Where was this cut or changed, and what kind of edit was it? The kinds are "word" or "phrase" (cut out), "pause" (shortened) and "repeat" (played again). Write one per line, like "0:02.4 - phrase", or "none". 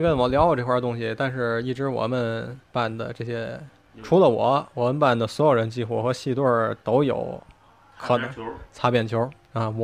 0:02.6 - pause
0:03.9 - word